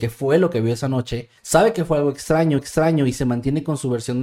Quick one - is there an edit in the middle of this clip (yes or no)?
yes